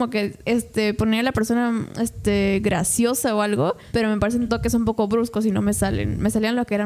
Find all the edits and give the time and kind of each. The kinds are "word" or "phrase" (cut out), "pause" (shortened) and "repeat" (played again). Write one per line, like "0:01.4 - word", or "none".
none